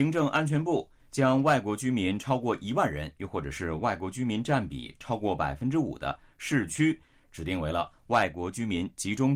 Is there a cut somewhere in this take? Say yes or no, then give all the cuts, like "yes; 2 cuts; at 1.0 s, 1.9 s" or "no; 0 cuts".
yes; 1 cut; at 6.7 s